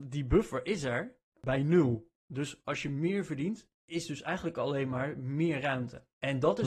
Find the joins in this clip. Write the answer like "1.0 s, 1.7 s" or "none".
3.7 s

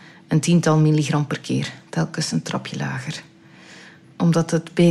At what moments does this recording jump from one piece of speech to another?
none

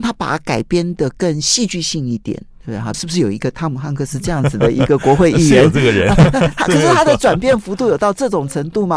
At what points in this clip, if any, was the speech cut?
2.9 s

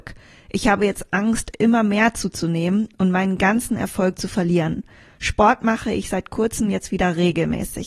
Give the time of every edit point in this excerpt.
none

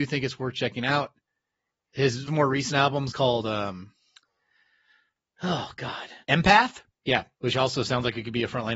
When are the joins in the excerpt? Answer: 2.3 s, 3.1 s, 6.2 s, 7.3 s

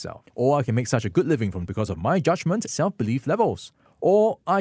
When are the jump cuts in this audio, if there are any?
1.7 s, 2.7 s

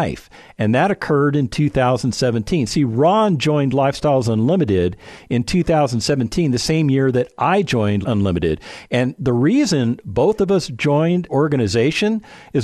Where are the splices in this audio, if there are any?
8.0 s, 11.3 s

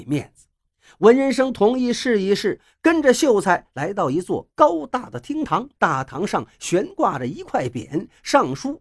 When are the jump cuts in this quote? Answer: 5.8 s

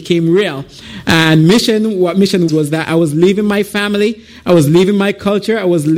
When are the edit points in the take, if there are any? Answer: 2.5 s

